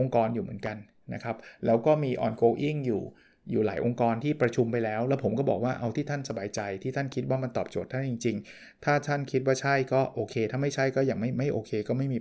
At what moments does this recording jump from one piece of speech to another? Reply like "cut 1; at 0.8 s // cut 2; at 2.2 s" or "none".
none